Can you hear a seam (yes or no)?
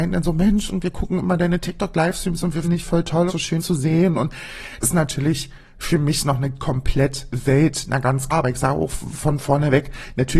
yes